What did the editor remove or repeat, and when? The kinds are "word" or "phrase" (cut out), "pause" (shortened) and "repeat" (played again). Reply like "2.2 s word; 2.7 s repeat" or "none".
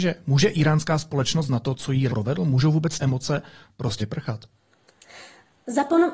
1.5 s word; 2.1 s word; 3.0 s word; 4.0 s word